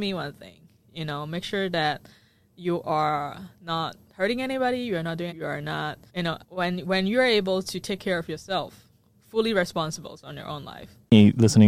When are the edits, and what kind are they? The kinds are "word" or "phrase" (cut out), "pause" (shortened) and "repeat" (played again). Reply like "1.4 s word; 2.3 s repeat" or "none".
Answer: 5.3 s phrase; 6.1 s pause; 6.4 s pause